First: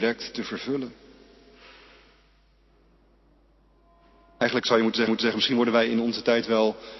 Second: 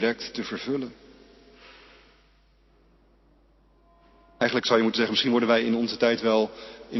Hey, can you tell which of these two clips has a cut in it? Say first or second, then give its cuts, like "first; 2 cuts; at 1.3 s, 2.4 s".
first; 1 cut; at 5.1 s